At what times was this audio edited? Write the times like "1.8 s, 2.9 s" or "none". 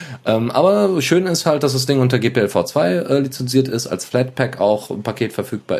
none